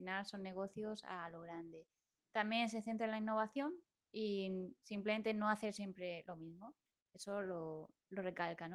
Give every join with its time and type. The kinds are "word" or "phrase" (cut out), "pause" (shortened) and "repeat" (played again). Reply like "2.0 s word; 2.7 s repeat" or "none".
none